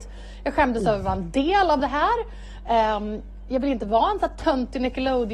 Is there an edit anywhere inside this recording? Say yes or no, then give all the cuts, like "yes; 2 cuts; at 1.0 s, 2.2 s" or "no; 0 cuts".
no; 0 cuts